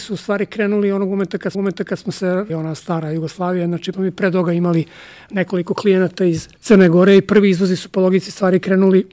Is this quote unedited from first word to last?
no; 4 cuts; at 1.5 s, 2.5 s, 3.9 s, 6.6 s

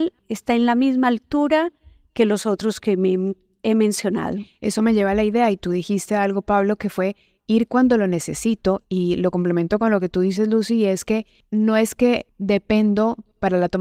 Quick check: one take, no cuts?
yes; 0 cuts

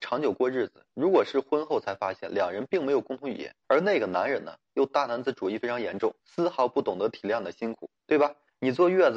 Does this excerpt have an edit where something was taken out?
yes; 3 cuts; at 3.6 s, 6.2 s, 8.0 s

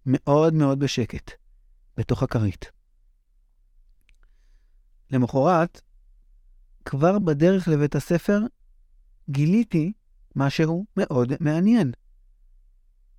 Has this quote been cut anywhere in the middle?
no; 0 cuts

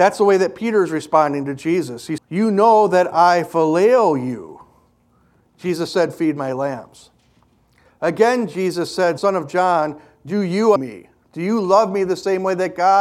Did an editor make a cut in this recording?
yes; 3 cuts; at 2.2 s, 9.2 s, 10.8 s

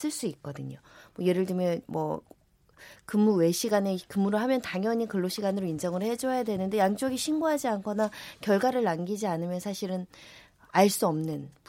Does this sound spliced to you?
no; 0 cuts

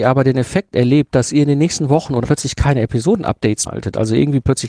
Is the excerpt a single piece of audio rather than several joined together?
no; 2 cuts; at 2.2 s, 3.7 s

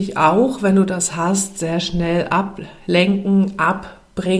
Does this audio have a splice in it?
no; 0 cuts

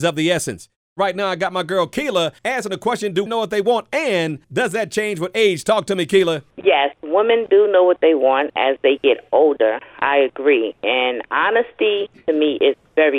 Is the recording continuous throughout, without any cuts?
no; 3 cuts; at 2.4 s, 3.3 s, 4.4 s

